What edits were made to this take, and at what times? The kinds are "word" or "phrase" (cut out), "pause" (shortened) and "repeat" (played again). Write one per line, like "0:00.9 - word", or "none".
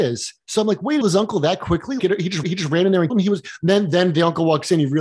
0:01.0 - phrase
0:02.0 - word
0:02.4 - repeat
0:03.1 - word